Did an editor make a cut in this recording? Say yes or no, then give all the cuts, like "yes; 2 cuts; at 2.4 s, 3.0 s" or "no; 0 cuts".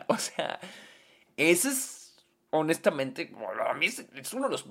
no; 0 cuts